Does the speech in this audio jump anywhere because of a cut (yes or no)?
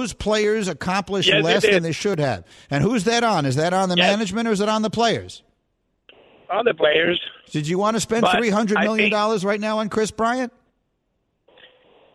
no